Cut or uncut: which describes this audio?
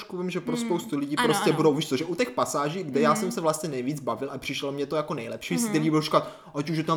uncut